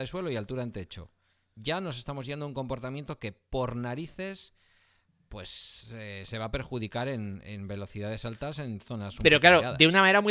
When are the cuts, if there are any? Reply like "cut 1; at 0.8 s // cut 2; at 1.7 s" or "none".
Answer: none